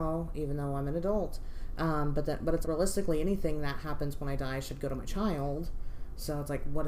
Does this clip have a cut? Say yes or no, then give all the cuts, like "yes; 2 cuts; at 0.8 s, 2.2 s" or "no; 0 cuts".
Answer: yes; 1 cut; at 2.6 s